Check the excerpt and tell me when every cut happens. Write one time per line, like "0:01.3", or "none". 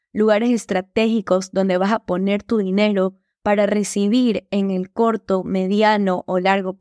none